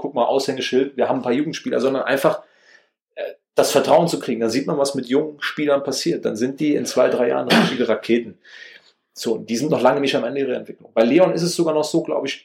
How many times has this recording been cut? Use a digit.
0